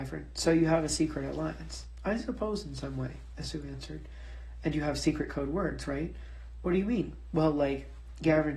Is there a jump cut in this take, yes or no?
no